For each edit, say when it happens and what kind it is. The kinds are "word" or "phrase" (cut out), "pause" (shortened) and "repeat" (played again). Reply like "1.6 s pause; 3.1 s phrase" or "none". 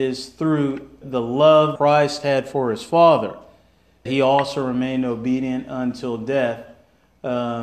1.0 s word; 1.8 s word; 4.1 s word